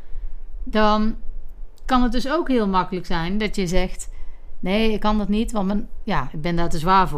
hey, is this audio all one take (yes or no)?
yes